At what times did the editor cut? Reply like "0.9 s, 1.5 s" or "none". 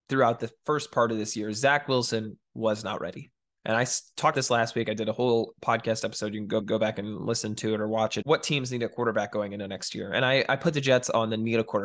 3.4 s, 4.3 s, 6.6 s, 8.2 s